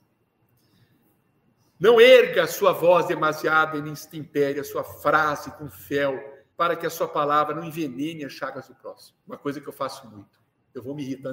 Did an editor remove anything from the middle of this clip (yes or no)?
yes